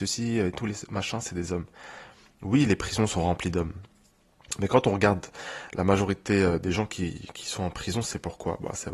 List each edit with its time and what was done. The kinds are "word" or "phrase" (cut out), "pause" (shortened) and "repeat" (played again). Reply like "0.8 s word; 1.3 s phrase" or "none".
none

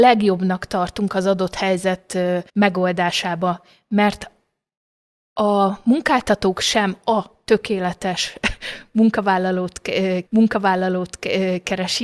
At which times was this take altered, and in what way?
2.5 s pause; 10.3 s repeat

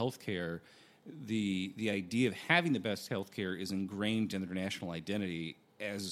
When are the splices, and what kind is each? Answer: none

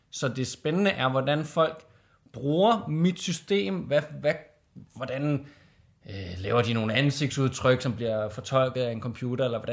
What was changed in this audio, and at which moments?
none

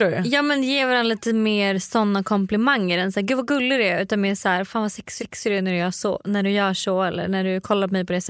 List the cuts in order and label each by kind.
5.2 s repeat

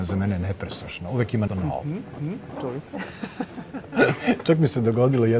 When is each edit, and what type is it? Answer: 1.5 s word; 2.2 s repeat

